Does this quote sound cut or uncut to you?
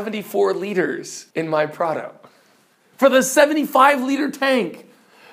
cut